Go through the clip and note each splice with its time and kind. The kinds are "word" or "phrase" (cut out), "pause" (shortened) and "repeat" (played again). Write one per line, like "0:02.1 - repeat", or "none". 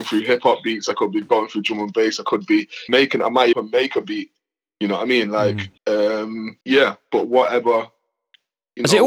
0:02.9 - word
0:03.5 - phrase
0:05.8 - pause
0:06.6 - pause